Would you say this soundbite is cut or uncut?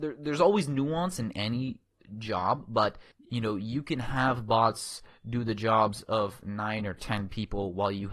cut